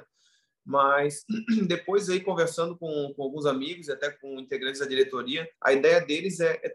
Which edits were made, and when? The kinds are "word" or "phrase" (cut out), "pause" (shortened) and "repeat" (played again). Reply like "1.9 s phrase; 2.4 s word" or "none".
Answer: 5.5 s pause